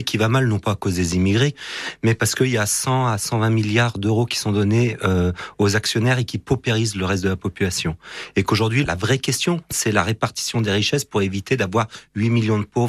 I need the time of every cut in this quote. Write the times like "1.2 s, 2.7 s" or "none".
none

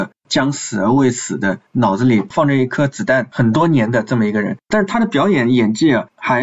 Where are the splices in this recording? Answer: 4.6 s

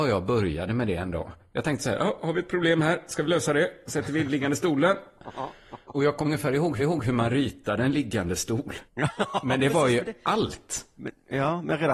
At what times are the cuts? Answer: 6.2 s, 6.8 s, 8.9 s

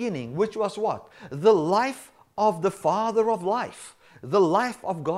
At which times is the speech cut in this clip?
none

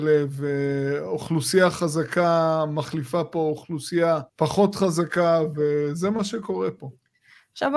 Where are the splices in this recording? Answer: 4.3 s

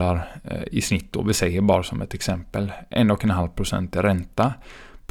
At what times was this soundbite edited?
none

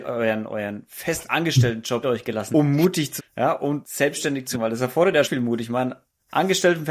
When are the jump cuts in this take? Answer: 2.0 s, 2.5 s, 3.2 s, 3.8 s, 4.5 s, 5.2 s

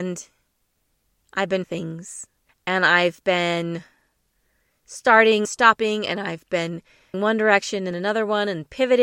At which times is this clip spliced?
1.6 s, 5.4 s, 7.1 s, 7.9 s

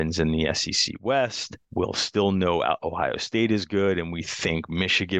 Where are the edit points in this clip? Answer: 1.6 s

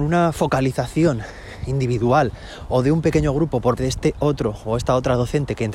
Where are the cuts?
3.8 s

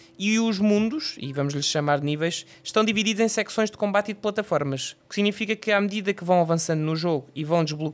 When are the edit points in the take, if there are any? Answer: 5.0 s

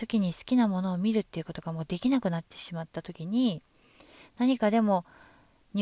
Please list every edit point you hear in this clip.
none

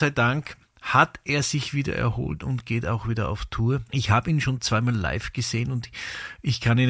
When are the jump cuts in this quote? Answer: 3.9 s

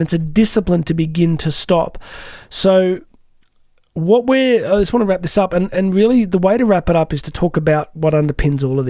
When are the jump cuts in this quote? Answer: none

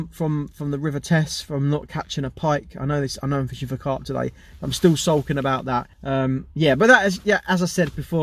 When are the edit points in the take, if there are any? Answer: 5.9 s

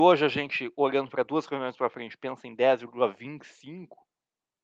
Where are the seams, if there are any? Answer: none

